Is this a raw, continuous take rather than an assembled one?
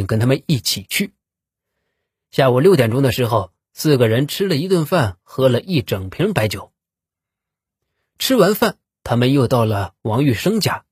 yes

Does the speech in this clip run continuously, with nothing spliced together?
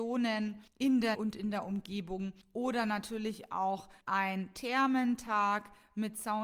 no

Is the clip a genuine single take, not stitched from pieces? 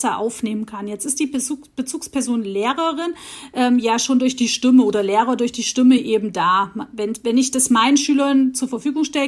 yes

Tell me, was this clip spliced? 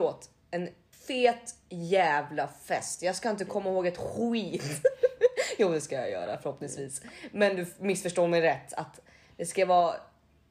yes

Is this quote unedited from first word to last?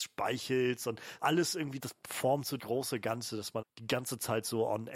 no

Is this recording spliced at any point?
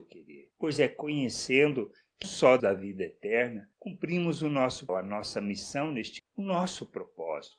yes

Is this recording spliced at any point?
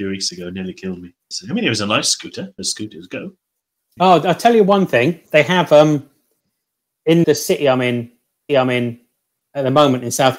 yes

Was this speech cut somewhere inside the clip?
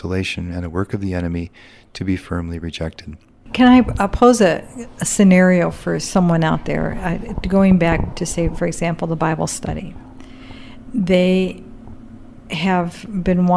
no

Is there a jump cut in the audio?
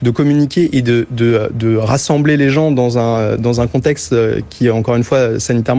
no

